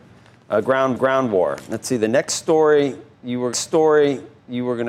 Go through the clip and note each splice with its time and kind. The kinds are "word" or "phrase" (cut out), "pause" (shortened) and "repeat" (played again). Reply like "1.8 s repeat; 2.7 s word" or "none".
0.9 s repeat; 3.5 s repeat

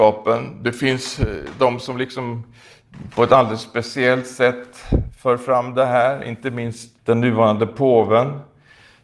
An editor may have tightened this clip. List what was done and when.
7.0 s pause

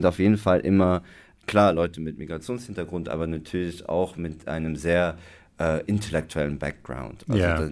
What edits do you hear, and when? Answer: none

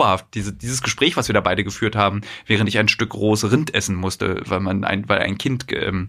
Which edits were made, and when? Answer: none

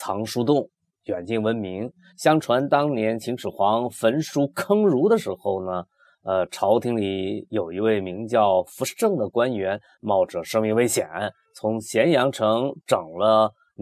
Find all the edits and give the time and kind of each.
none

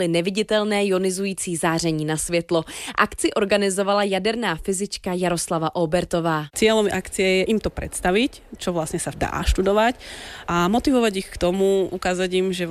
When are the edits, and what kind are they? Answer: 9.1 s word

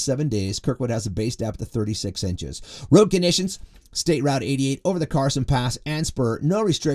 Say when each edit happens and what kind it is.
none

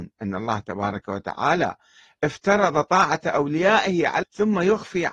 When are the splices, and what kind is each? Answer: 4.2 s word

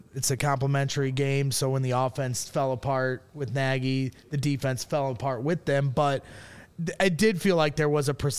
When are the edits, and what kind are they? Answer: none

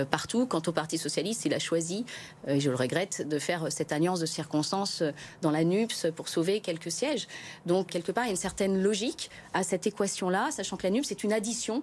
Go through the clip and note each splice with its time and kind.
7.9 s word

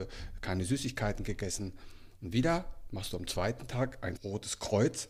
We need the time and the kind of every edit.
4.2 s word

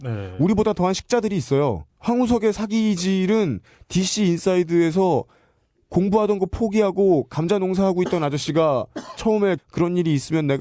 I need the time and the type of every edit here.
9.6 s word

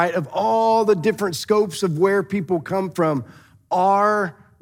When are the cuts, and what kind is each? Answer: none

